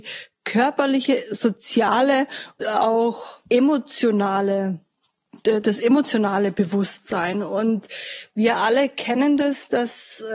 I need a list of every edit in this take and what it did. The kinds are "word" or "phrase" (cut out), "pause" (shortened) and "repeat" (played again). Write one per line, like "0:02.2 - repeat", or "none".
0:02.6 - word
0:03.5 - pause